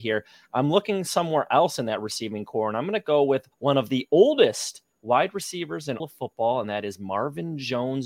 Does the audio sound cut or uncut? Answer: cut